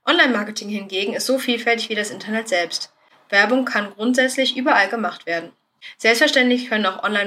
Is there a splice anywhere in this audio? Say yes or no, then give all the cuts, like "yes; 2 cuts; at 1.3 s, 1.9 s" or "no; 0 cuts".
no; 0 cuts